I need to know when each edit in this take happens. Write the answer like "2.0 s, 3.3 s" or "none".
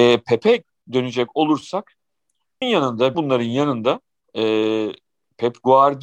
2.6 s, 3.1 s, 4.2 s